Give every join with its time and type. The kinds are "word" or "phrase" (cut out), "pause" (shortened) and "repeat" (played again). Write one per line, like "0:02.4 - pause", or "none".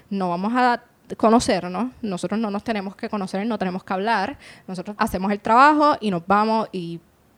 0:05.0 - word